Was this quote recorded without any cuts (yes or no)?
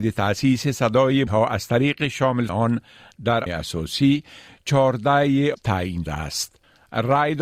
no